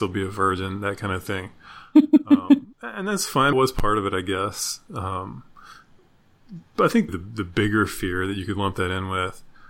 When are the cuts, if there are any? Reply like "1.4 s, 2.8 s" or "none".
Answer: 2.7 s, 3.5 s, 7.1 s